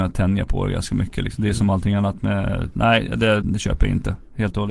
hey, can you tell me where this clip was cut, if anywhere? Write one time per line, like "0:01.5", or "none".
0:03.4